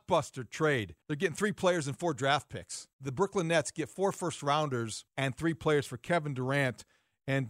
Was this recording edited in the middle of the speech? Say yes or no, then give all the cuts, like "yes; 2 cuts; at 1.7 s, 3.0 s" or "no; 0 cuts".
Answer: yes; 3 cuts; at 1.0 s, 2.9 s, 5.1 s